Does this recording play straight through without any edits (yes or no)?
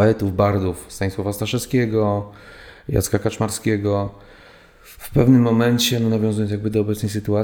yes